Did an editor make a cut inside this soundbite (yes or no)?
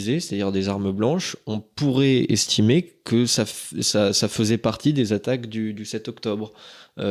no